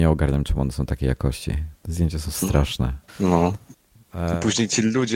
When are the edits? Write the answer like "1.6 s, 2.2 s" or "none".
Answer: 3.1 s